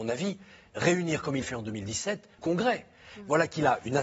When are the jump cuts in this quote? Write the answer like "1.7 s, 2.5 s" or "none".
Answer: 1.4 s, 2.4 s

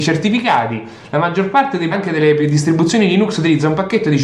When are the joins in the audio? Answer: 1.9 s

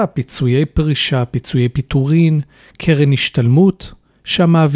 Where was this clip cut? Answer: none

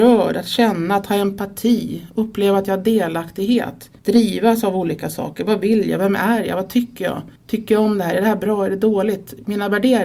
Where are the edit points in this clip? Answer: 4.0 s, 7.4 s

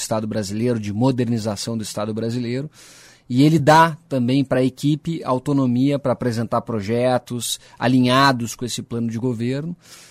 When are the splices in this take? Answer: none

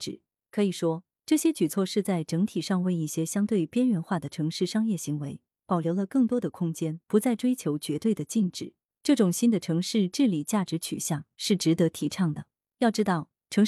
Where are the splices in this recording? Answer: 7.0 s

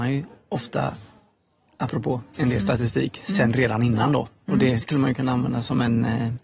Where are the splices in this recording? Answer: none

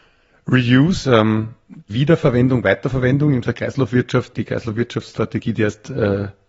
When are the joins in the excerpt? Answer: 1.0 s, 1.9 s, 3.4 s, 4.3 s

